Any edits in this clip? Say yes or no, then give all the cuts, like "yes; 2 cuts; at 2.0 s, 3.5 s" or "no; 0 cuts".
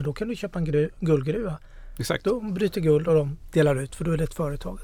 no; 0 cuts